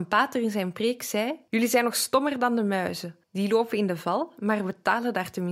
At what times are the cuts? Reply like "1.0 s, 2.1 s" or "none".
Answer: 1.5 s, 3.2 s